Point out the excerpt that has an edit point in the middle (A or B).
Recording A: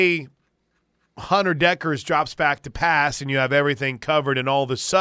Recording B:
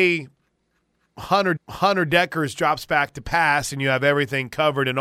B